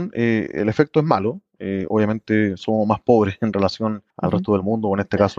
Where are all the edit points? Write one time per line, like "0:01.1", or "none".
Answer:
0:04.1